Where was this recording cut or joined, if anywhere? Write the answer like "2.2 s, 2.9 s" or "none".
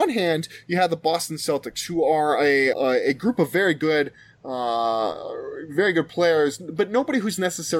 2.7 s